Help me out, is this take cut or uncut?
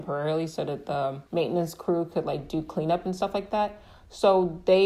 cut